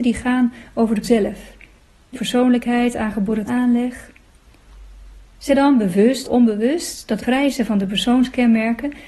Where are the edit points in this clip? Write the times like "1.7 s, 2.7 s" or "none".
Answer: 1.0 s, 2.1 s, 3.5 s, 5.5 s, 6.2 s, 7.2 s